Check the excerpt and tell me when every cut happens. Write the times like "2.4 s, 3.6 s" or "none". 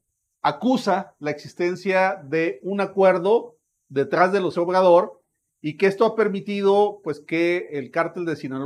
4.5 s